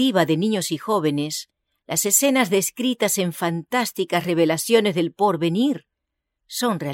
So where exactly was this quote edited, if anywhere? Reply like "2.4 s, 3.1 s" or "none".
none